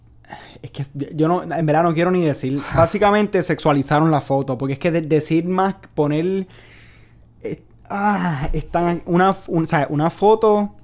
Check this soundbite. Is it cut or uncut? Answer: uncut